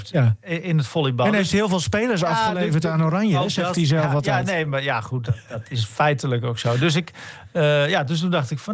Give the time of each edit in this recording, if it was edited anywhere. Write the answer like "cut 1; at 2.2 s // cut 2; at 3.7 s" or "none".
none